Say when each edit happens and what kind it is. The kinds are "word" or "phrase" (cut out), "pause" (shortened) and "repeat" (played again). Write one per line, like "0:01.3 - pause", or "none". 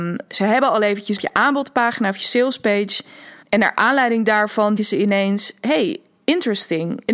0:01.2 - phrase
0:03.4 - pause
0:04.8 - word